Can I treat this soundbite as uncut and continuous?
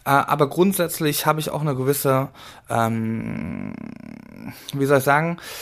yes; 0 cuts

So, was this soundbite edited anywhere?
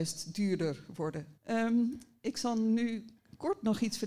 yes; 1 cut; at 1.4 s

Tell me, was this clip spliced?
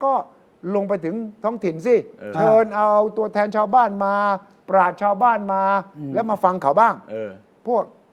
no; 0 cuts

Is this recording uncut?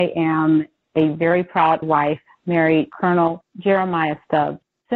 no; 2 cuts; at 1.8 s, 2.9 s

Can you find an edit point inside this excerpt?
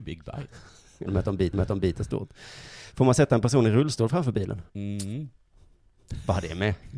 yes; 3 cuts; at 1.1 s, 1.5 s, 4.7 s

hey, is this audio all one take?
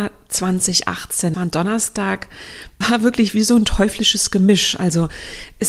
no; 2 cuts; at 1.3 s, 2.8 s

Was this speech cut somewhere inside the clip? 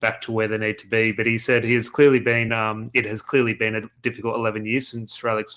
no; 0 cuts

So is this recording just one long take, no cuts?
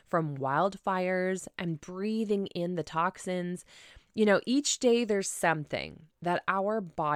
yes; 0 cuts

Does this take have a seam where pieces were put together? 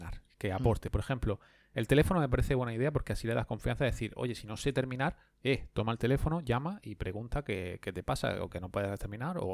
no; 0 cuts

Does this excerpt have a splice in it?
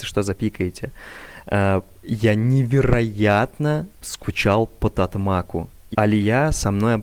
yes; 2 cuts; at 4.0 s, 5.9 s

